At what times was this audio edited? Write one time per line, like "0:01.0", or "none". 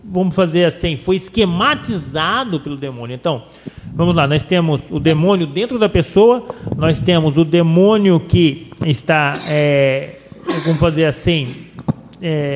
none